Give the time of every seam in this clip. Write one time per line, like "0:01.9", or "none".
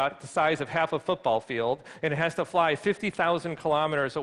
none

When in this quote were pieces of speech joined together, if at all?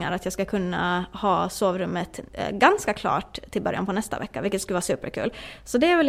0:02.3

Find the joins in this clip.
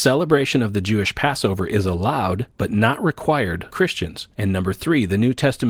0:02.5
0:03.7
0:04.3

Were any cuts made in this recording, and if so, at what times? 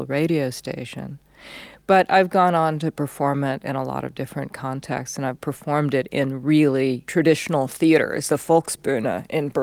0:05.3
0:08.3

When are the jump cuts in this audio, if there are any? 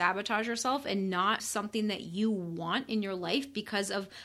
0:01.4

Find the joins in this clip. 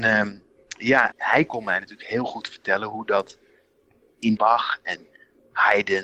0:01.1
0:04.4

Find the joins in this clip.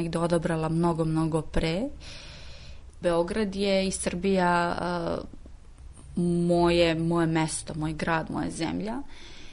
none

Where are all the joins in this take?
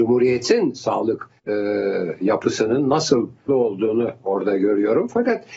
0:01.4
0:03.5

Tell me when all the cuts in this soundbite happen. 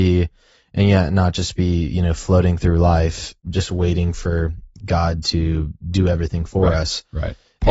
0:03.4

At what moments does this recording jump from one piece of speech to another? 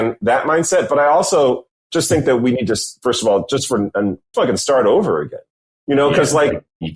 0:04.3

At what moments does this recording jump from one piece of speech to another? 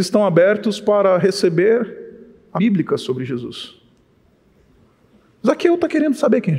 0:02.6

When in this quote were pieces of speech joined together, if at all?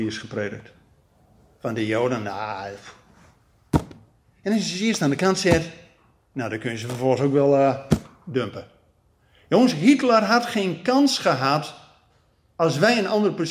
none

